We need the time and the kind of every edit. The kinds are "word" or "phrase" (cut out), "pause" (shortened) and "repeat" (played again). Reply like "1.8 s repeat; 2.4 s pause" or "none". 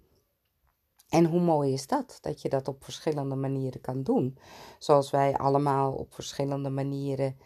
none